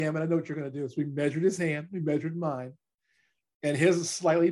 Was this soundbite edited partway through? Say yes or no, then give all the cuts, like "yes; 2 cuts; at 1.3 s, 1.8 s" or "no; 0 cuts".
no; 0 cuts